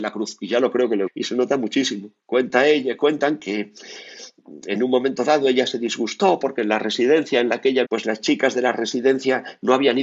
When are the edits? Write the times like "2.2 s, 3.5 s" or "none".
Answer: 1.1 s, 2.2 s, 7.8 s

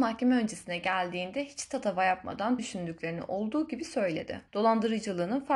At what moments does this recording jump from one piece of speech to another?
2.6 s, 4.5 s

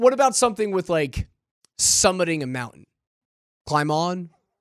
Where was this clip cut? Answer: 1.5 s

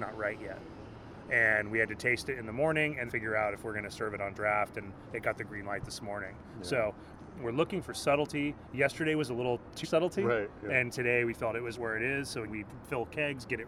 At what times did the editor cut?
3.1 s, 9.8 s, 11.7 s, 12.5 s

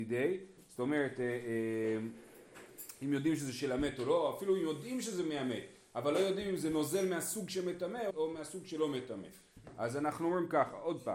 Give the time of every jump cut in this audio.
8.1 s

